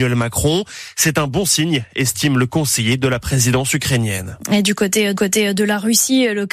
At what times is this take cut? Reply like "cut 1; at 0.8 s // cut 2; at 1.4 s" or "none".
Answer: cut 1; at 5.2 s

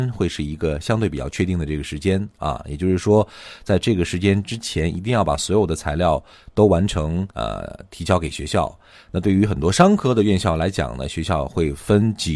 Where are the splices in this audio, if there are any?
cut 1; at 7.3 s

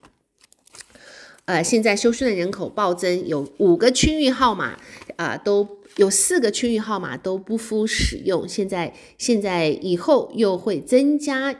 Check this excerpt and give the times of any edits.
none

